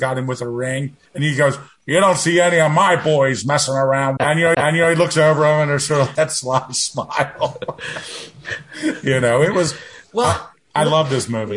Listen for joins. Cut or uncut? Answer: cut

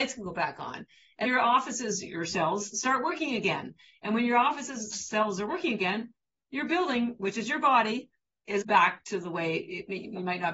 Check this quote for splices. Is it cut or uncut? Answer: cut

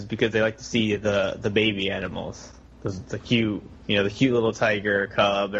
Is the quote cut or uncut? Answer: uncut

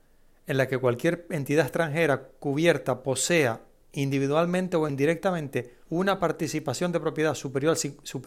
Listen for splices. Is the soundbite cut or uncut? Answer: cut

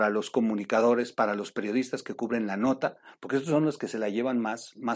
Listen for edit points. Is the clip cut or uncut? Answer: uncut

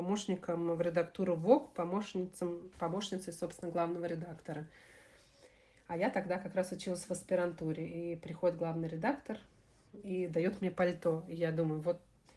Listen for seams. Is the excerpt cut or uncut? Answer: uncut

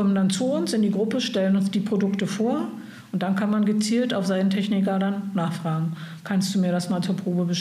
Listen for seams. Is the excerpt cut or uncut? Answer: uncut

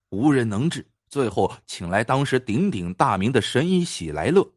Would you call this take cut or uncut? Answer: cut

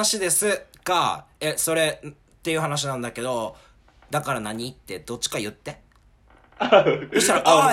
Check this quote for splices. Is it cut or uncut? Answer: uncut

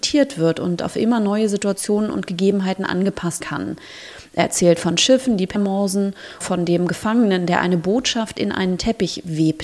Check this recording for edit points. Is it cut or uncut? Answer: cut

